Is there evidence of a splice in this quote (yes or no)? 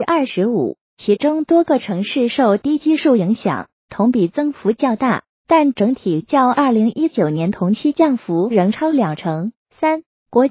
yes